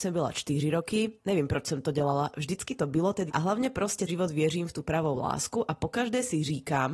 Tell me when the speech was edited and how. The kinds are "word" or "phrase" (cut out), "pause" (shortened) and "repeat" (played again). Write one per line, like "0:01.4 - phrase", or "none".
0:01.2 - pause
0:03.3 - word
0:04.1 - word